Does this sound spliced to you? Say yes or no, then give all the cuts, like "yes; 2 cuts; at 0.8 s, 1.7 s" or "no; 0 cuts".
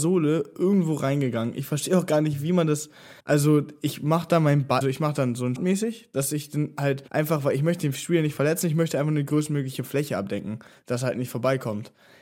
yes; 4 cuts; at 3.2 s, 4.8 s, 5.6 s, 7.1 s